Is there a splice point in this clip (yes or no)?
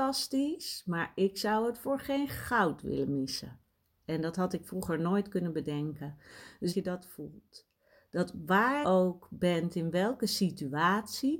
yes